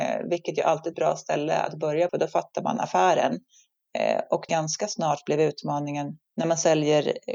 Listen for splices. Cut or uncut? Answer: cut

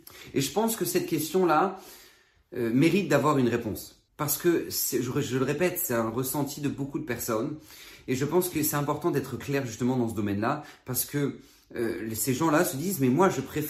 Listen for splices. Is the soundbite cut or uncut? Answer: cut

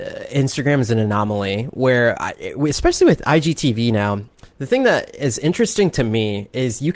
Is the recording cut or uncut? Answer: uncut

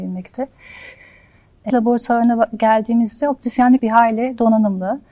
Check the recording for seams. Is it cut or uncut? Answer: cut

